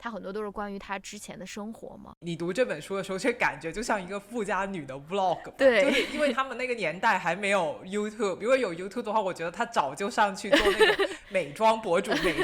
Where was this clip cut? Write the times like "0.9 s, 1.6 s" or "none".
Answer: none